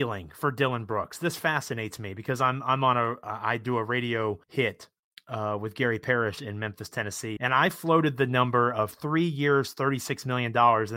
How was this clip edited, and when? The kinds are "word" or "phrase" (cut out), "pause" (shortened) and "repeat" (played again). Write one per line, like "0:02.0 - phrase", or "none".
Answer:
0:04.4 - pause
0:07.4 - word